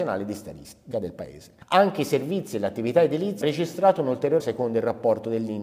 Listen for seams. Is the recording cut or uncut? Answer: cut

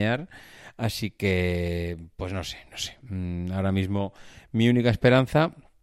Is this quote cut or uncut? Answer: uncut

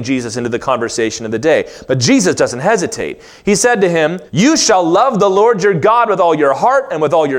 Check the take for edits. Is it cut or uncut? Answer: cut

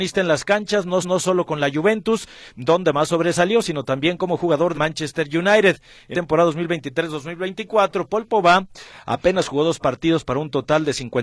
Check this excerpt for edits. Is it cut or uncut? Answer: cut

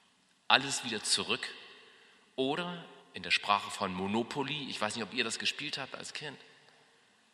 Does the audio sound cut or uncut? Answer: cut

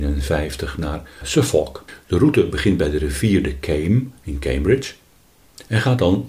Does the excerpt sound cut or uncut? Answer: uncut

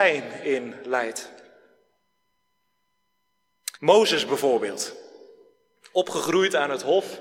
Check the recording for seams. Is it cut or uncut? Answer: cut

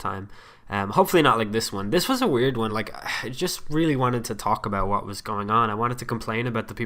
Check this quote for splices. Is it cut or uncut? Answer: uncut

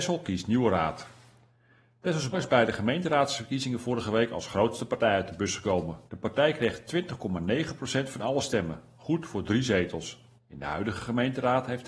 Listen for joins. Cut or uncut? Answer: cut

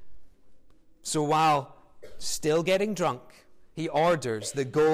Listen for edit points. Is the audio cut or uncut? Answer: uncut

